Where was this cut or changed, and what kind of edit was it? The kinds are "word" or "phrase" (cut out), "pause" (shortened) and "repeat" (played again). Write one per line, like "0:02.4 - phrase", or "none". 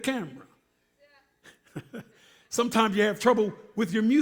none